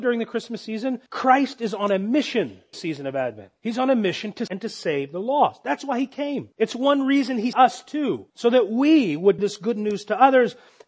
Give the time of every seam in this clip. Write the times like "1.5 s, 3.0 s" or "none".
1.1 s, 2.7 s, 3.6 s, 4.5 s, 6.5 s, 7.5 s, 8.3 s, 9.4 s